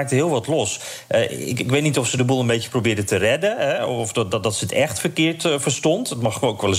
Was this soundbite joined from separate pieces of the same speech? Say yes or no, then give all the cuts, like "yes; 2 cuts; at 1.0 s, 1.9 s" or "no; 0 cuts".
no; 0 cuts